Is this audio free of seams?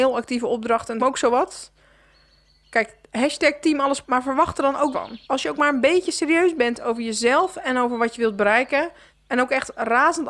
no; 4 cuts; at 1.0 s, 4.0 s, 4.9 s, 5.2 s

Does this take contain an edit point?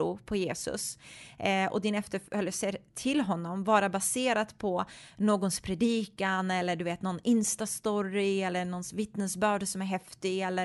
no; 0 cuts

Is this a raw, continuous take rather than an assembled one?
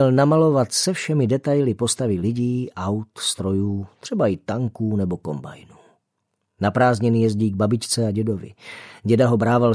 yes; 0 cuts

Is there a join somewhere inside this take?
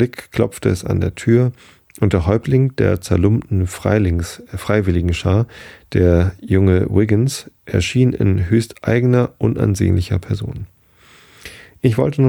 no; 0 cuts

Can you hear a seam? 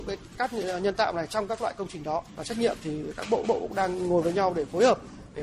yes; 2 cuts; at 2.3 s, 3.4 s

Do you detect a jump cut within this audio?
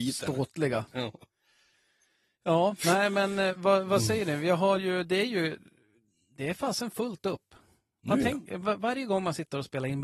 no; 0 cuts

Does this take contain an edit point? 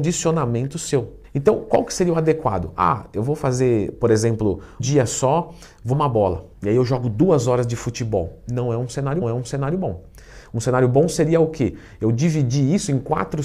yes; 5 cuts; at 1.2 s, 4.8 s, 5.9 s, 6.5 s, 9.2 s

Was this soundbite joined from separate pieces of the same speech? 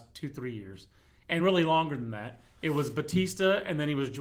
no; 0 cuts

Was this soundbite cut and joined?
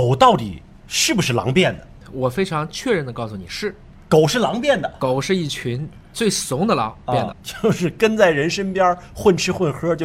yes; 1 cut; at 7.3 s

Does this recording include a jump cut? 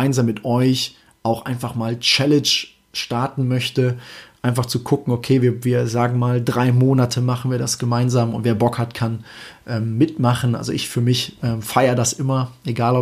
no; 0 cuts

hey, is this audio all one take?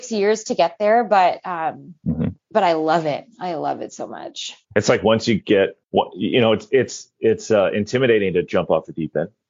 no; 3 cuts; at 2.4 s, 4.6 s, 5.8 s

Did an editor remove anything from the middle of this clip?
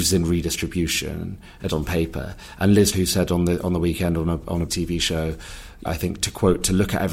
yes; 4 cuts; at 1.7 s, 2.9 s, 4.7 s, 5.9 s

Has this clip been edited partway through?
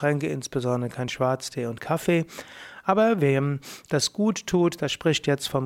no; 0 cuts

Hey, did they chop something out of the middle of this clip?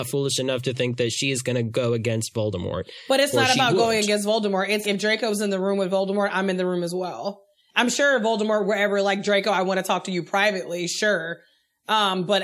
yes; 1 cut; at 4.8 s

